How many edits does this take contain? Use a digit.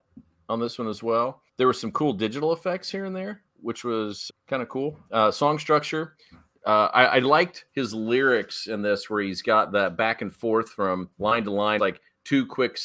6